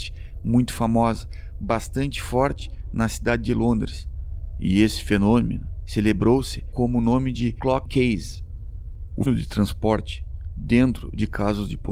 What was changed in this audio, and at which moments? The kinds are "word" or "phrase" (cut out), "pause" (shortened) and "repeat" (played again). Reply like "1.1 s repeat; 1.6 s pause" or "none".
7.9 s word; 9.3 s word